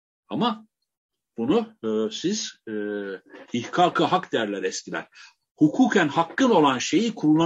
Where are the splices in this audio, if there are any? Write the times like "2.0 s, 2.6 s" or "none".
none